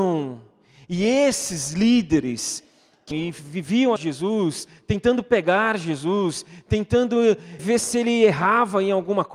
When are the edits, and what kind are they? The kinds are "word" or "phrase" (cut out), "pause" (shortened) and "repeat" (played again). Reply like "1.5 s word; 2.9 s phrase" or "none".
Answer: 3.1 s word; 4.0 s word; 7.6 s word